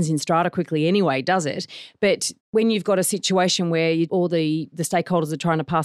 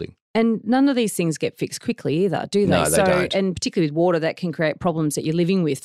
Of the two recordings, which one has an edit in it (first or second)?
first